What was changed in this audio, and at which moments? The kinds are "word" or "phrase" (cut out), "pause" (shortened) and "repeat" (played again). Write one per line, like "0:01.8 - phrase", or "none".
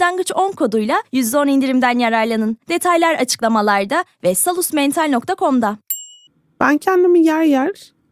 0:02.6 - pause
0:06.3 - pause